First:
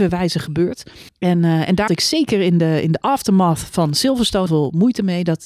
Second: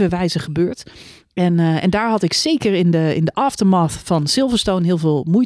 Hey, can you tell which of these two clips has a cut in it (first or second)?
first